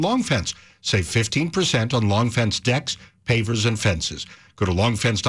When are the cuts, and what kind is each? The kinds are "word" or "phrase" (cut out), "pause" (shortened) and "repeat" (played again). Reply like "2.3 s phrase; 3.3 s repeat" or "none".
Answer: none